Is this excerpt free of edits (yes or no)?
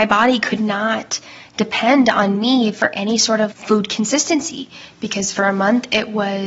no